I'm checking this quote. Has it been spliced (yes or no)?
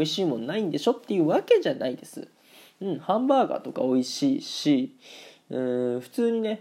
no